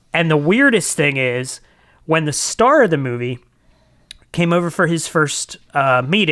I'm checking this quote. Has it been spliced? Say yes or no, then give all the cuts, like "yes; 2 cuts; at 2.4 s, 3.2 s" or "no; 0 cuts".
no; 0 cuts